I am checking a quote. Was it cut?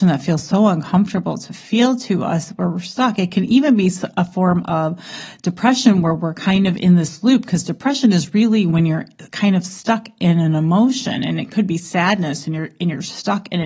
no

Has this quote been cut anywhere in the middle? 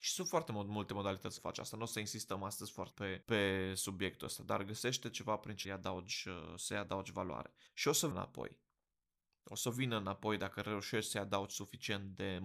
yes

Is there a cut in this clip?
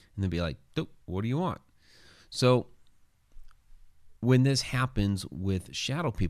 yes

